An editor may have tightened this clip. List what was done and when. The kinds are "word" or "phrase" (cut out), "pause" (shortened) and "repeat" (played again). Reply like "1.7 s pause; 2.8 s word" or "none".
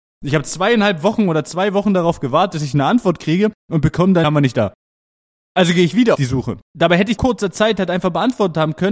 4.2 s word; 6.1 s word; 6.7 s pause; 7.2 s phrase